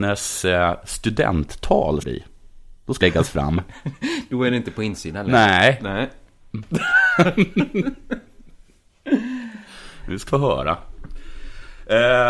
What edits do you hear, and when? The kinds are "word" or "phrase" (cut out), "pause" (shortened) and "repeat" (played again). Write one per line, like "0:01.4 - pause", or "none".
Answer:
0:02.0 - word
0:03.0 - word
0:10.3 - word